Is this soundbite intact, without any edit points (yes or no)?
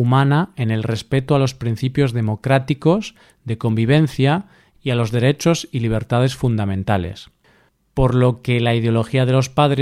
yes